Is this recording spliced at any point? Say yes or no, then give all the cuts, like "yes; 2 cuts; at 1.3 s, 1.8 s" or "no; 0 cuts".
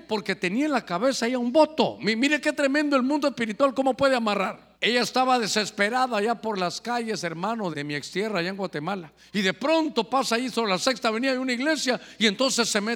yes; 3 cuts; at 4.7 s, 7.7 s, 9.2 s